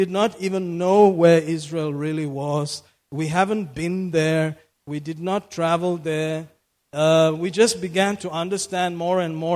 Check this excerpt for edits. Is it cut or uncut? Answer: uncut